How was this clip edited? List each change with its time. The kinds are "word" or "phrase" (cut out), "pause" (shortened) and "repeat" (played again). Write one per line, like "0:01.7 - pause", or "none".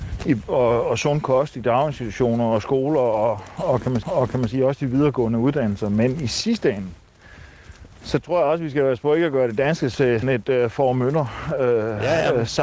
0:04.0 - repeat
0:09.9 - word
0:10.2 - word